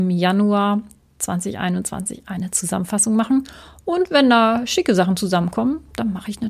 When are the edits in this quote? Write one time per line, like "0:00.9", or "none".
none